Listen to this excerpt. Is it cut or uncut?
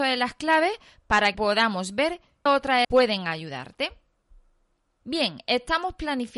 cut